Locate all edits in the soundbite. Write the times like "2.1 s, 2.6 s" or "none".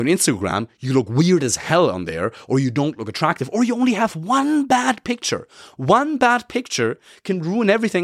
none